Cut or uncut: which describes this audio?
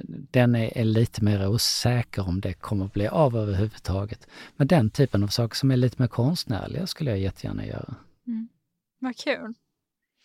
uncut